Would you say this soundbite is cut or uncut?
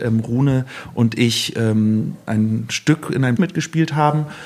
cut